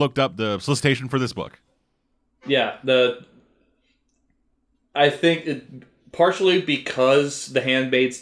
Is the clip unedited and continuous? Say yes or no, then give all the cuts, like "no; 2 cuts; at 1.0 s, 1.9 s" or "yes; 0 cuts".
yes; 0 cuts